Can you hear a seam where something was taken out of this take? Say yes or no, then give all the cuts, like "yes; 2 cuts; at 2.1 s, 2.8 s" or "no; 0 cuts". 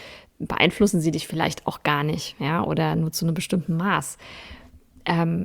no; 0 cuts